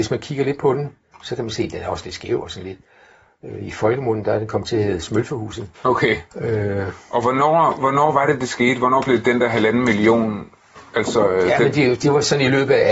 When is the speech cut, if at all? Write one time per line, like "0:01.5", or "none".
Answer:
0:01.1
0:05.7